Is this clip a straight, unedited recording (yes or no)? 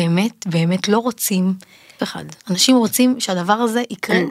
no